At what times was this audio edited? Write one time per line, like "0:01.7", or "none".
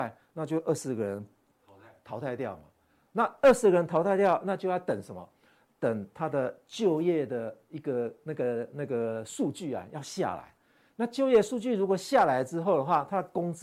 none